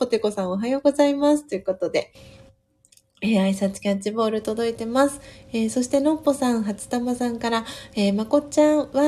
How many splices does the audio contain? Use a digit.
0